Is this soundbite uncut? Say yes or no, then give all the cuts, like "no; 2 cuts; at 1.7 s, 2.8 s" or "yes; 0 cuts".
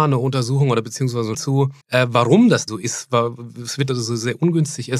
no; 4 cuts; at 1.3 s, 1.8 s, 2.7 s, 3.9 s